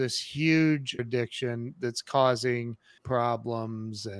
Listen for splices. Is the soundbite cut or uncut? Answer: cut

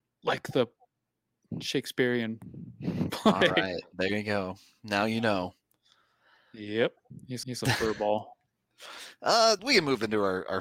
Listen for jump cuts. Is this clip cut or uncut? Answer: cut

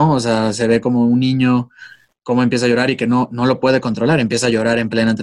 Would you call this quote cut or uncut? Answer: uncut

